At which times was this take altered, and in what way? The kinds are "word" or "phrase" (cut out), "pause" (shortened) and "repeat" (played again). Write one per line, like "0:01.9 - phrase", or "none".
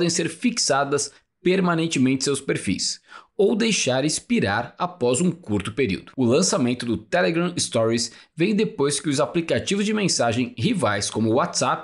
none